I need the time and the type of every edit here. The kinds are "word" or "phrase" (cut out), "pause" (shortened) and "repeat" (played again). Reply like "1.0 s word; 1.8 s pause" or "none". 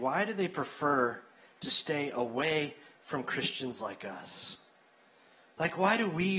none